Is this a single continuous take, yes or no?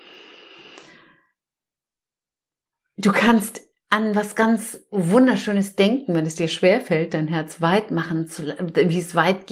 yes